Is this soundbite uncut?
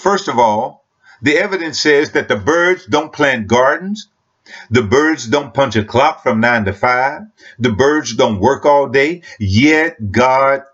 yes; 0 cuts

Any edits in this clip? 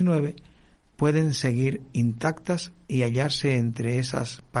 no; 0 cuts

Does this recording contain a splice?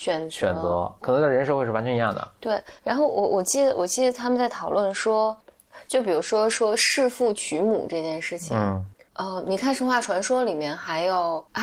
yes; 1 cut; at 1.0 s

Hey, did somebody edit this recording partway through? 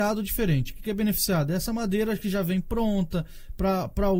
no; 0 cuts

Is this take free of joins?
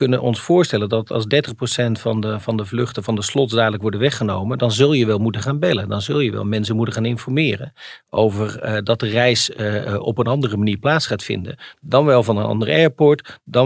yes; 0 cuts

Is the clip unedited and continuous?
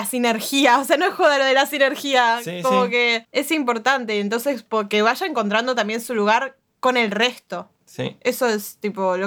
yes; 0 cuts

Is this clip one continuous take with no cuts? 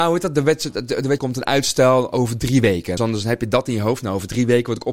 no; 2 cuts; at 1.2 s, 3.0 s

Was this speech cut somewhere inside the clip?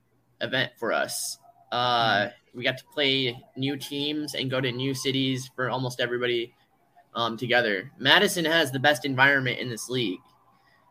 no; 0 cuts

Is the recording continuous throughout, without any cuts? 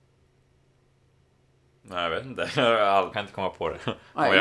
no; 1 cut; at 3.1 s

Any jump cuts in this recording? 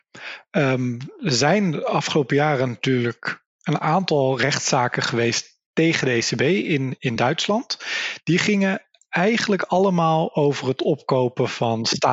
no; 0 cuts

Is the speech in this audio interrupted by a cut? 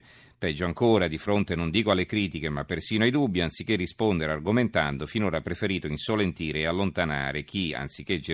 no; 0 cuts

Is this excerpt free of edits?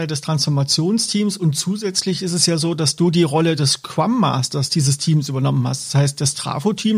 yes; 0 cuts

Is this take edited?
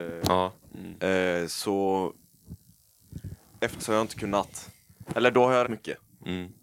yes; 2 cuts; at 3.8 s, 5.6 s

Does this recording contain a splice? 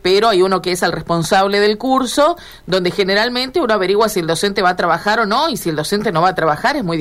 no; 0 cuts

